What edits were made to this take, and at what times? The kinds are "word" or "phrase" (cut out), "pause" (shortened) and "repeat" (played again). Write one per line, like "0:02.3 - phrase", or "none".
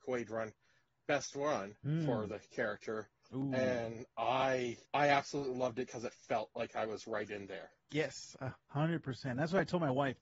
0:01.8 - pause
0:04.9 - pause
0:07.8 - pause